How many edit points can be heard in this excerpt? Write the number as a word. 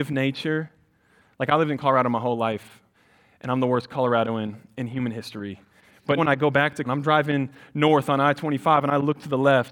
two